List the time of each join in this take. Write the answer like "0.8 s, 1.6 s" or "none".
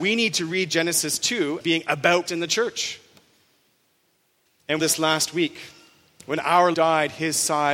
1.6 s, 2.3 s, 4.8 s, 6.7 s

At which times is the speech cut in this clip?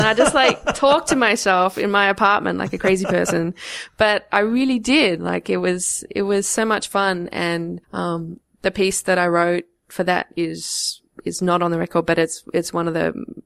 7.8 s

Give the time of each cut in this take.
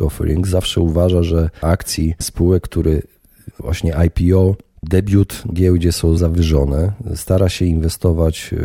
1.6 s, 3.5 s, 5.5 s, 6.2 s

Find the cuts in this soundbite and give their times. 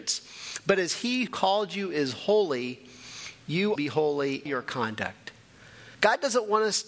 1.3 s, 3.8 s, 4.5 s, 5.9 s

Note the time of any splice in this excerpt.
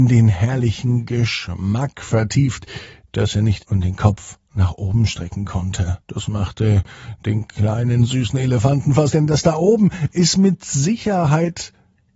3.6 s, 6.0 s, 9.1 s

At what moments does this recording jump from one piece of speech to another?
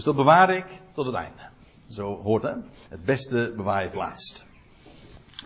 1.6 s, 2.4 s, 2.8 s, 3.9 s

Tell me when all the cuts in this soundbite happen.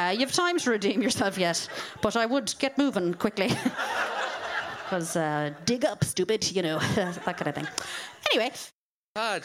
none

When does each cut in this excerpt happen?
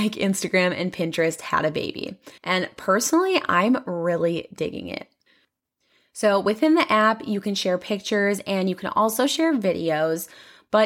2.4 s

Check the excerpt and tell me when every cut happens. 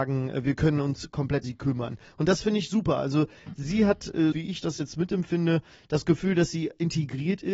1.4 s, 4.3 s

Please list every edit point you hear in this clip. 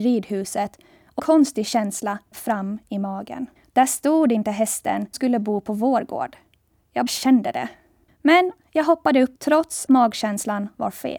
1.2 s, 2.3 s, 3.6 s, 5.1 s, 7.1 s, 8.1 s, 9.4 s, 9.9 s

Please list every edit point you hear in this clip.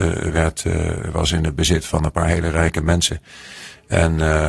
none

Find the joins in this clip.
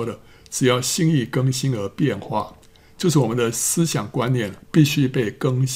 2.6 s, 4.6 s

